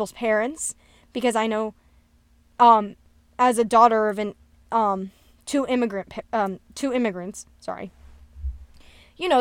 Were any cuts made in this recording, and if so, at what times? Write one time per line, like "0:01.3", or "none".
none